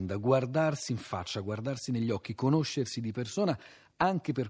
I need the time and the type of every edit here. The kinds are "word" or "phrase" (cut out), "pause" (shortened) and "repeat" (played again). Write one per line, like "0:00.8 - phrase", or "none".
none

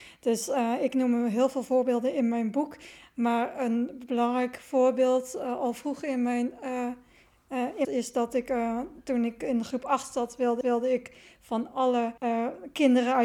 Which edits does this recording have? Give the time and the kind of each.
0:07.8 - phrase
0:10.6 - repeat
0:12.2 - pause

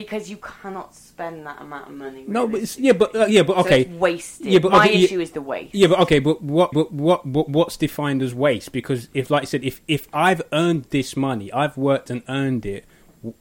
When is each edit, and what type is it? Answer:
0:06.7 - repeat

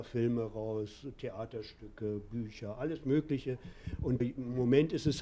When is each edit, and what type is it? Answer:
0:04.2 - word

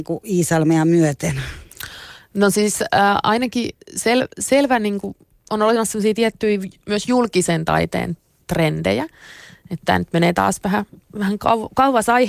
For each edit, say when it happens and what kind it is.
0:03.8 - pause

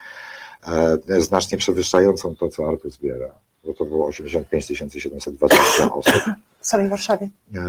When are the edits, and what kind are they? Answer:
none

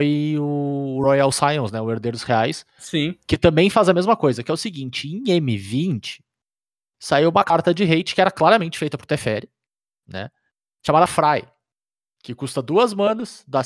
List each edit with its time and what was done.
none

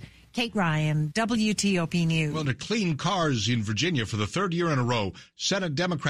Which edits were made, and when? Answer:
0:02.5 - word

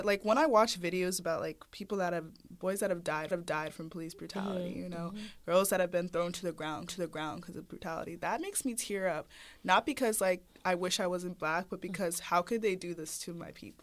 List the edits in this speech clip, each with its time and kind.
0:03.3 - repeat
0:06.9 - repeat
0:07.7 - word

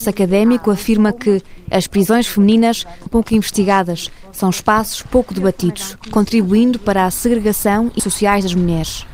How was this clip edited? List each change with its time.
0:03.1 - word
0:08.0 - word

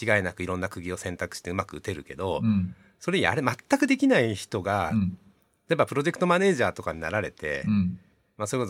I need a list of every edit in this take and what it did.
none

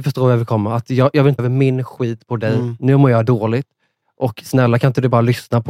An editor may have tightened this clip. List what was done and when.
0:01.4 - word

